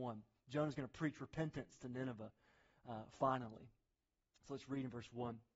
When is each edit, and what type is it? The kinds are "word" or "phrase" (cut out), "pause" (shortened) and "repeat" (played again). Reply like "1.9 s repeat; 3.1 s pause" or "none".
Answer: none